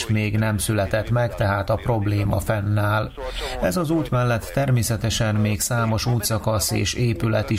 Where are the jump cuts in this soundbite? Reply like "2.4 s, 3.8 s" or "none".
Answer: none